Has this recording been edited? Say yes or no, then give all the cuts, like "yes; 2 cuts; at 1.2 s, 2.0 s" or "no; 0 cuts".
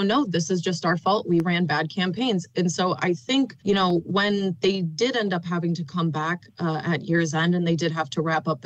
yes; 1 cut; at 3.6 s